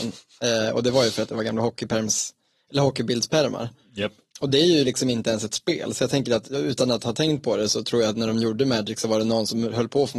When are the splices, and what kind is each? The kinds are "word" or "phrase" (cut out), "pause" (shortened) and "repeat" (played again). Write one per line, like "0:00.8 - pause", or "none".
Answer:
none